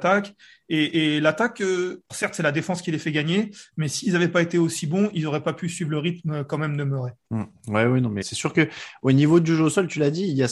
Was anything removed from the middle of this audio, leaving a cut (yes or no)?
yes